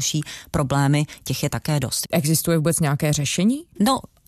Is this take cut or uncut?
uncut